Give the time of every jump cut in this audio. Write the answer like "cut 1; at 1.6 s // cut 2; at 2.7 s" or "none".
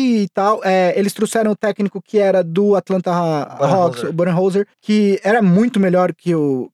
cut 1; at 4.7 s